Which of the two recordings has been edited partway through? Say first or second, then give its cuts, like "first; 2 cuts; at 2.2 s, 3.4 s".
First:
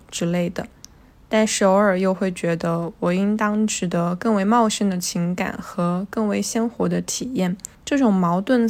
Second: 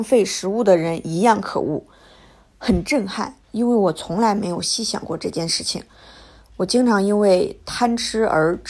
first; 1 cut; at 7.7 s